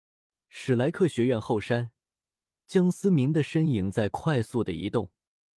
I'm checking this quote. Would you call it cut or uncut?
uncut